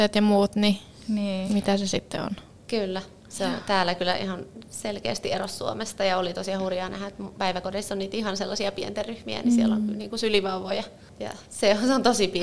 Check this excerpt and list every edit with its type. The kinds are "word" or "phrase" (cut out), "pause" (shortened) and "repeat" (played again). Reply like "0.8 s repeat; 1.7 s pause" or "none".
none